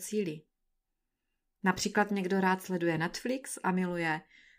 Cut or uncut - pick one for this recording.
uncut